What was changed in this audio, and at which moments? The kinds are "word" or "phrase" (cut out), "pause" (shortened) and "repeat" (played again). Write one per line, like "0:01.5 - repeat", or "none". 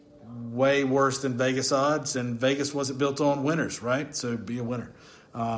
none